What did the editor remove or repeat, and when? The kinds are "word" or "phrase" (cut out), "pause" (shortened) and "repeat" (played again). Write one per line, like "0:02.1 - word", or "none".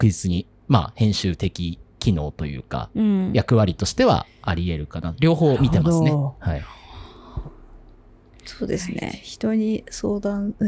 0:01.9 - pause